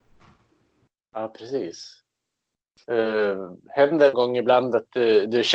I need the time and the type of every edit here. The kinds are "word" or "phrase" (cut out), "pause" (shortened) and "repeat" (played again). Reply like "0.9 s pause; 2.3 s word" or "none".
4.1 s phrase